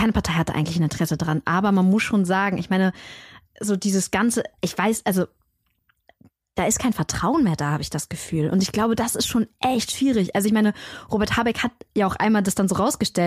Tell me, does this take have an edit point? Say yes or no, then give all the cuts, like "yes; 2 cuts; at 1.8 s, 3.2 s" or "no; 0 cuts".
no; 0 cuts